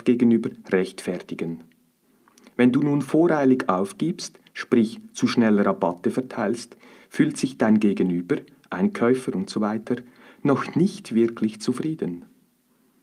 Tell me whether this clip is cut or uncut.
uncut